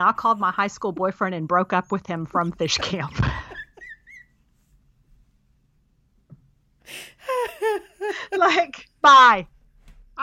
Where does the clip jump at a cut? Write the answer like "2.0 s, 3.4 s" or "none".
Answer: 9.0 s